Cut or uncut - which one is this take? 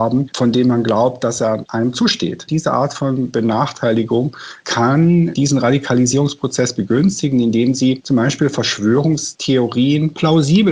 uncut